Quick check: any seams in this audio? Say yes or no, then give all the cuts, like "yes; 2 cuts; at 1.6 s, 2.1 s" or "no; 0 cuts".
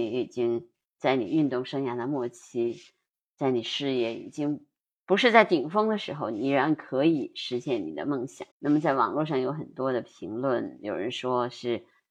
yes; 1 cut; at 8.5 s